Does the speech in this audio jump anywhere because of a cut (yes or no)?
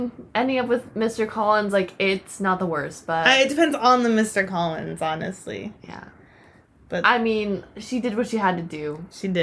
no